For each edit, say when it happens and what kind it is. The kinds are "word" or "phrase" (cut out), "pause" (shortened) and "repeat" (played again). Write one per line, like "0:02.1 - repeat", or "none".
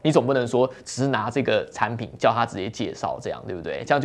none